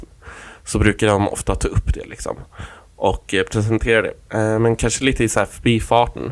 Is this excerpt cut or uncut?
uncut